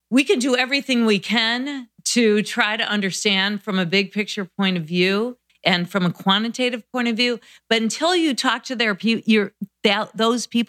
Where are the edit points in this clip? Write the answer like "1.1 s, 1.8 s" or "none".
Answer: none